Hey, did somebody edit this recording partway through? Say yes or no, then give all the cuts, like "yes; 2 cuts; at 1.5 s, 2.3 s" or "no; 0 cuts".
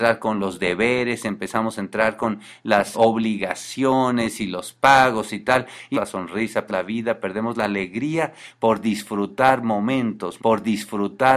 yes; 4 cuts; at 2.9 s, 5.9 s, 6.7 s, 10.4 s